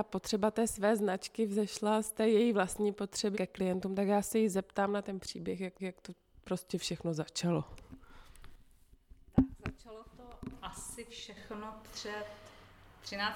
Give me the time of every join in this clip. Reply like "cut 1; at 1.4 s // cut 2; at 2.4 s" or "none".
cut 1; at 3.3 s // cut 2; at 5.8 s